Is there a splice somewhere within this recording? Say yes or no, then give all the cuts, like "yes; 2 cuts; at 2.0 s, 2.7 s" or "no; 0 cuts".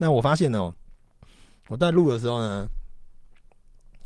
no; 0 cuts